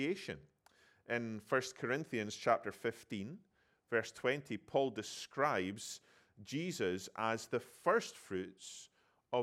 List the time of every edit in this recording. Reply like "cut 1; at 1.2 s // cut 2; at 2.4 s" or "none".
none